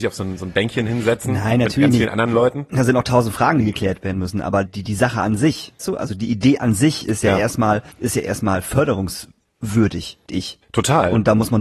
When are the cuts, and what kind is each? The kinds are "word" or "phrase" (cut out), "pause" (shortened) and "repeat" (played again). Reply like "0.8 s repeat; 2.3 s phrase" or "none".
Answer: 4.7 s word; 5.8 s word; 7.9 s pause; 10.3 s word; 10.6 s pause